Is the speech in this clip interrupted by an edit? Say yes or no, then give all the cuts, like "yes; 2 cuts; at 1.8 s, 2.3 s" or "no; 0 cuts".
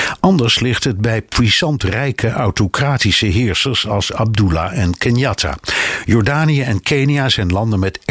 no; 0 cuts